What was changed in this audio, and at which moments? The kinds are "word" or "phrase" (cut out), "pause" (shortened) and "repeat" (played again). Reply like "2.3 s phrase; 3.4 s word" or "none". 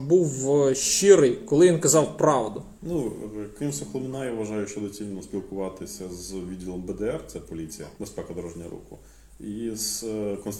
2.7 s pause; 7.9 s pause